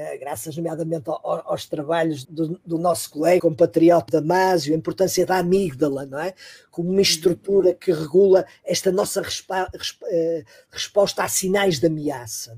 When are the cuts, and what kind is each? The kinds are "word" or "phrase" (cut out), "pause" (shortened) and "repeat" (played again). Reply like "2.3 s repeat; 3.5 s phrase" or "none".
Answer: 2.2 s word; 2.6 s word; 3.4 s word; 4.1 s word